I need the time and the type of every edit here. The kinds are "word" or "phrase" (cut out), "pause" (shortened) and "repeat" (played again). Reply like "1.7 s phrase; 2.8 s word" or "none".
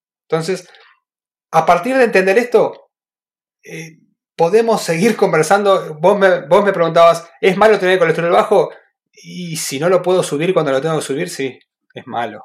none

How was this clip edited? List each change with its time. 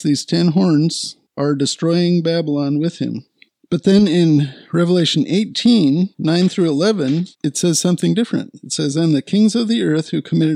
1.3 s pause; 3.5 s pause; 6.1 s pause; 7.3 s pause

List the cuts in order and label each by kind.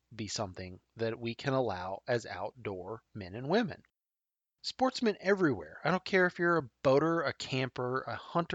none

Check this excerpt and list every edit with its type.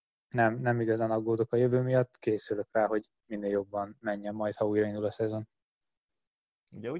3.2 s pause

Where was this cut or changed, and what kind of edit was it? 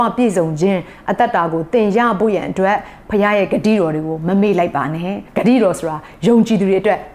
5.3 s pause

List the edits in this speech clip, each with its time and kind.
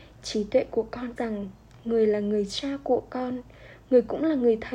1.2 s word

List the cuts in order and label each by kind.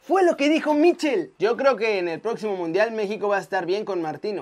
1.4 s pause

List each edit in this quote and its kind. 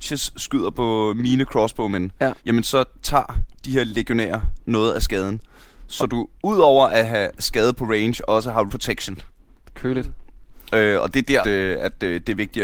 2.4 s pause; 8.7 s word; 11.4 s word

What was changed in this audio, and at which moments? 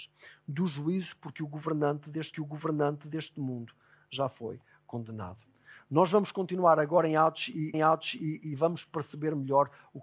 2.3 s repeat; 7.7 s repeat

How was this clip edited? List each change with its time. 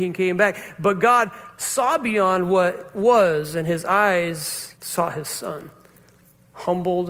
4.7 s pause

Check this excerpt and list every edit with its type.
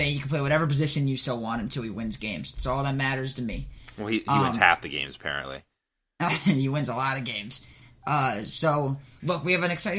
none

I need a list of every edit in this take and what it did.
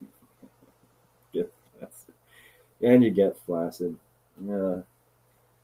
none

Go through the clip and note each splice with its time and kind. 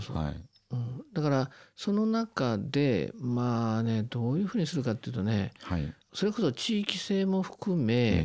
6.0 s pause

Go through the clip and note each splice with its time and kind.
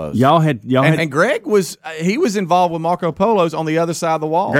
1.0 s phrase

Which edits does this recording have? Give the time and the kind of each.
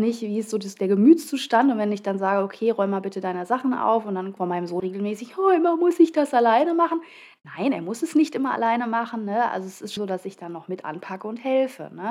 4.4 s word; 4.8 s word; 10.0 s word

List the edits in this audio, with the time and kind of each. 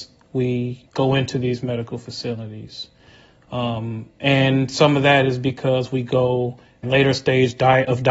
6.8 s word

